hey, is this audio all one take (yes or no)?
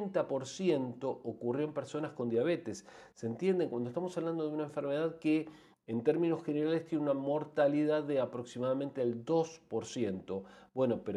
yes